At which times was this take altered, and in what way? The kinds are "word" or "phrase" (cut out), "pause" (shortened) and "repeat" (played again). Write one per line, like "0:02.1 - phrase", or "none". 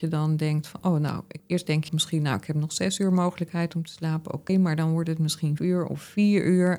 0:01.4 - word
0:01.9 - word
0:04.5 - word
0:05.6 - word